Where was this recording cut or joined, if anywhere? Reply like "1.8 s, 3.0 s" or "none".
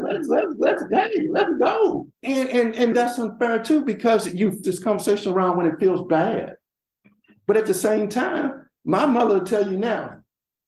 2.1 s, 2.9 s, 4.6 s